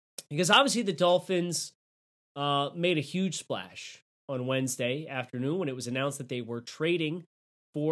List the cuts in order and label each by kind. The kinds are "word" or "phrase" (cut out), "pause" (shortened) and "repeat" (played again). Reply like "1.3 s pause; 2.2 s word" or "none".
none

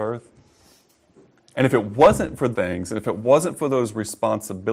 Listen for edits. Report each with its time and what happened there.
2.5 s word

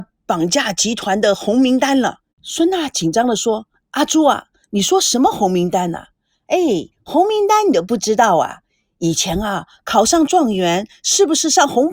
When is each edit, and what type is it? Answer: 2.2 s pause; 6.9 s pause

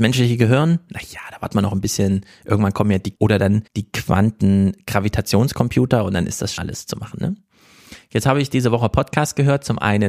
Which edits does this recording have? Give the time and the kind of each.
3.1 s word; 3.7 s pause; 6.6 s word

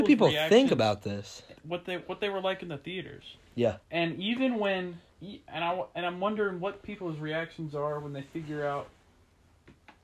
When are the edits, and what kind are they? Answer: 1.6 s pause; 3.8 s pause; 5.1 s pause

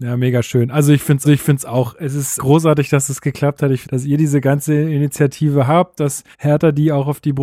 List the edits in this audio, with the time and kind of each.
1.2 s repeat; 2.4 s word; 3.8 s phrase; 6.3 s pause

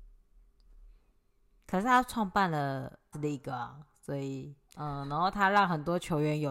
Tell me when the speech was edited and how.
3.1 s word; 4.6 s pause

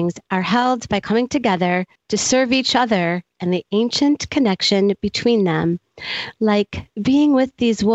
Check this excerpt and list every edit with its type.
2.0 s pause

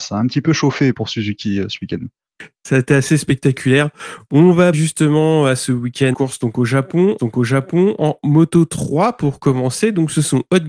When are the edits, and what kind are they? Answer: 0.9 s word; 4.7 s word; 6.1 s word; 7.2 s repeat

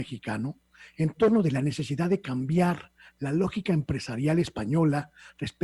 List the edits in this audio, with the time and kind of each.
none

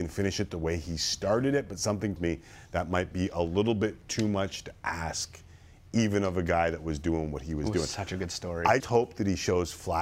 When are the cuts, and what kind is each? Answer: 2.2 s word; 8.8 s word

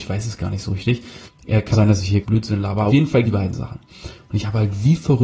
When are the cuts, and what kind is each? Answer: 1.3 s pause; 1.7 s word; 2.2 s word; 2.9 s word; 3.2 s word

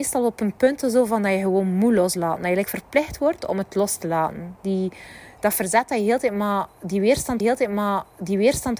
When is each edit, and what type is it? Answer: 7.4 s repeat

